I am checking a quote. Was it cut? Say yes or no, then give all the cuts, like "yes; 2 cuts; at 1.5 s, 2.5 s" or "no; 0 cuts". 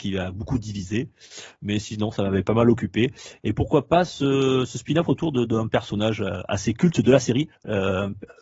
no; 0 cuts